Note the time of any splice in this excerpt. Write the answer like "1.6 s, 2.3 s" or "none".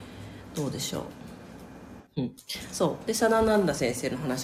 2.1 s

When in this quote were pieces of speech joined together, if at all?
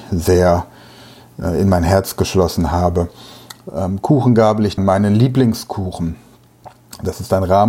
4.8 s

